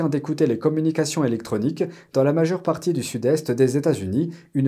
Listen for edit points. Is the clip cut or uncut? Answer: uncut